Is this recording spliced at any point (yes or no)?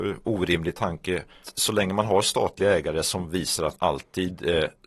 yes